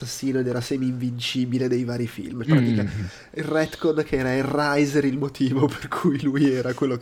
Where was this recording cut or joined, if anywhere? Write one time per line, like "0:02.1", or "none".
0:02.4